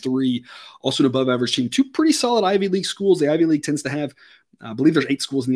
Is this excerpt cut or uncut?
uncut